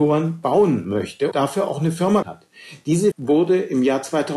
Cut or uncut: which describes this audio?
cut